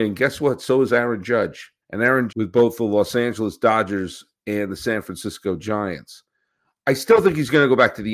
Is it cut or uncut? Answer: cut